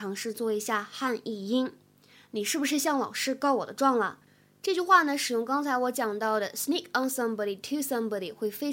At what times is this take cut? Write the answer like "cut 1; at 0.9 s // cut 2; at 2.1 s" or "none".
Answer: none